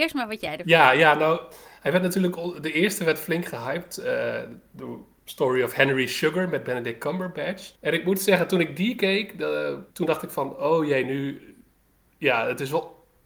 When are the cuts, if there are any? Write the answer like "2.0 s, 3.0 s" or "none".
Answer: 7.7 s, 9.9 s